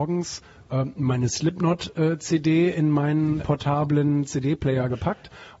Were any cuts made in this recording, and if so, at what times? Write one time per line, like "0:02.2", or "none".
0:03.4